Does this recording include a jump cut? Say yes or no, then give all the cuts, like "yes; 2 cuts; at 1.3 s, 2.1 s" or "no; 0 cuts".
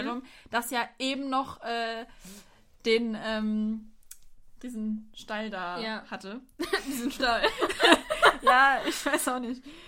no; 0 cuts